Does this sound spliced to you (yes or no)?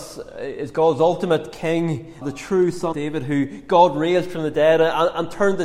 yes